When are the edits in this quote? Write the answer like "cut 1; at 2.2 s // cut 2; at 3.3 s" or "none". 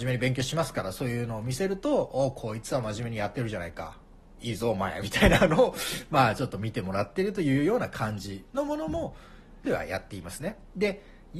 cut 1; at 9.6 s